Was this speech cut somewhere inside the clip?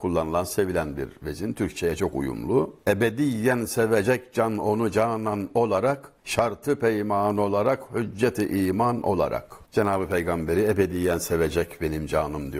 yes; 2 cuts; at 6.2 s, 9.7 s

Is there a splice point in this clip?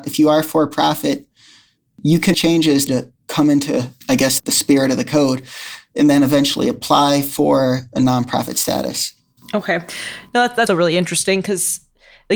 yes; 6 cuts; at 2.3 s, 2.9 s, 4.0 s, 4.4 s, 9.4 s, 10.7 s

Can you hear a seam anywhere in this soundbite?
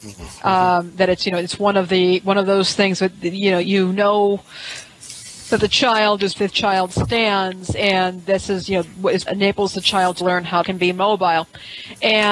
yes; 5 cuts; at 3.6 s, 6.4 s, 9.3 s, 10.2 s, 10.6 s

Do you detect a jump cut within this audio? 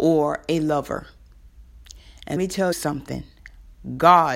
yes; 2 cuts; at 2.4 s, 2.7 s

